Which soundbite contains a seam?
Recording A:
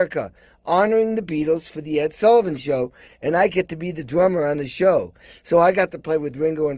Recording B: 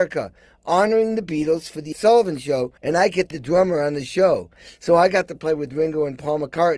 B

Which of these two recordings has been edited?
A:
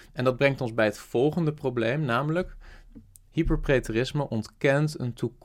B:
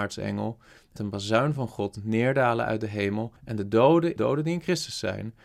B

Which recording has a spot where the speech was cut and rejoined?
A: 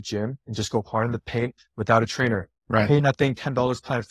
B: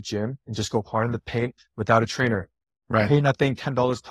A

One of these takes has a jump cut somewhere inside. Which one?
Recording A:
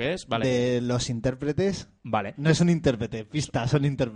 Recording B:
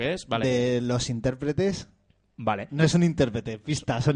A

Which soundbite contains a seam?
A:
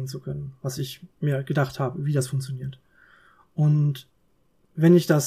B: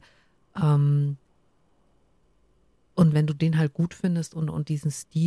B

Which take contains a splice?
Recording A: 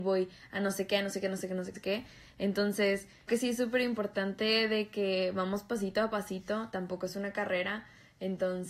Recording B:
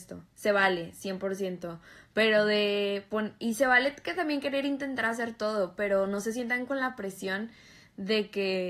A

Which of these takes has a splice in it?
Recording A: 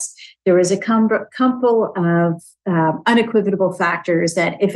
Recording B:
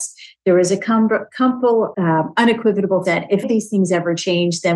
B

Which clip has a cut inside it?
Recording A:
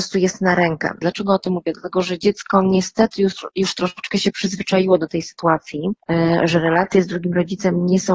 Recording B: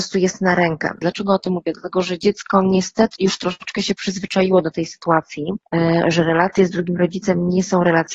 B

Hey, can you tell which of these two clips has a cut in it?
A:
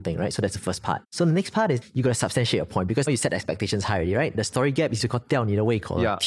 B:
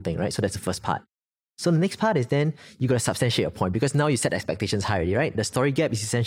A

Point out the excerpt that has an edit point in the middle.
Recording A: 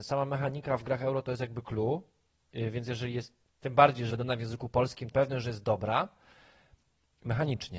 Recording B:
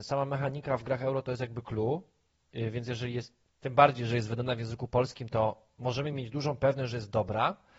A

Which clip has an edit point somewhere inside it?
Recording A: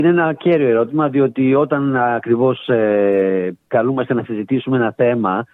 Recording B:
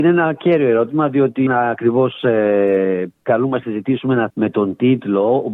B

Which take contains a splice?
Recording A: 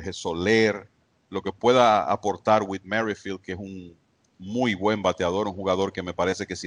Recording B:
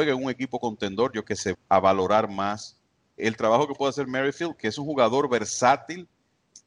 B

